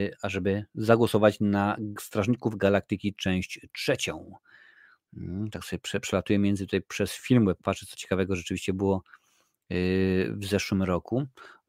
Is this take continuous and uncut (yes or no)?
yes